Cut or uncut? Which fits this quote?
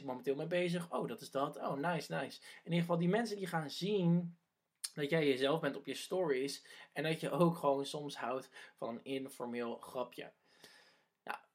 uncut